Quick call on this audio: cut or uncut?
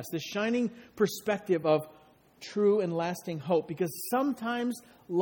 uncut